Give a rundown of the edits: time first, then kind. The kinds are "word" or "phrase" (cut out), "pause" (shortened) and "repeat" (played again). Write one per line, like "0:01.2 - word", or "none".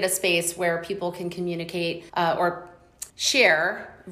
0:02.1 - pause
0:03.1 - pause